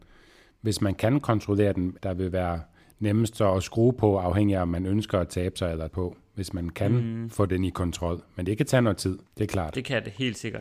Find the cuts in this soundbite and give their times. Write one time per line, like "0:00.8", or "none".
0:02.0
0:05.9
0:09.3

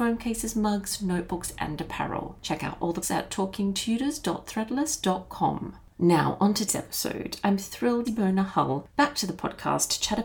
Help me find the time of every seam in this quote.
0:03.0
0:06.7
0:08.0

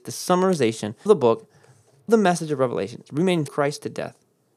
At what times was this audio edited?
0:01.1
0:02.1
0:03.5

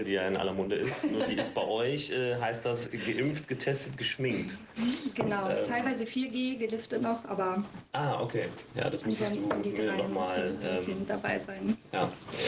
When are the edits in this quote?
none

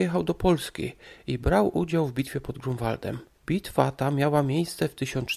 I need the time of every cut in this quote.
0:03.4

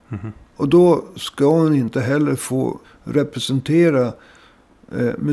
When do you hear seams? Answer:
0:02.8

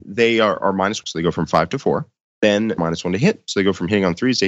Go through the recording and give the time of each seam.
0:01.0
0:02.8

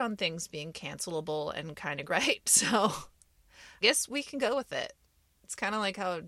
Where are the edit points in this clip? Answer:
0:02.1
0:03.8

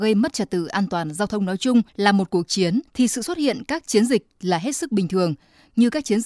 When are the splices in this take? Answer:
0:01.9
0:02.9

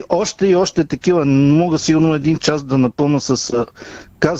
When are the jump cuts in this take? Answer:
none

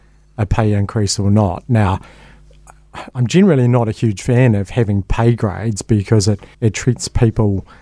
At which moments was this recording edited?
0:06.5

